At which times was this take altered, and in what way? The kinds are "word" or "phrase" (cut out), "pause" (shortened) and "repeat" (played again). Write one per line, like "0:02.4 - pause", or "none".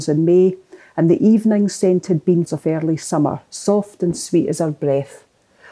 0:02.4 - word